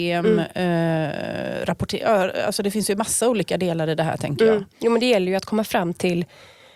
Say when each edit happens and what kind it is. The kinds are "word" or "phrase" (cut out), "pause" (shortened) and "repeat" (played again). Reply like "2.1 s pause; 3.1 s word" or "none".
none